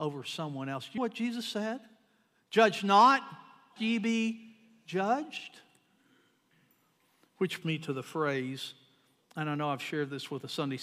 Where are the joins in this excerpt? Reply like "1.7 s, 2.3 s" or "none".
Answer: 1.0 s, 3.8 s, 7.6 s